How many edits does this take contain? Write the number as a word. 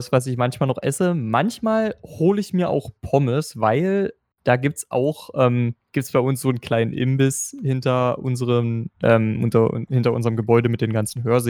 one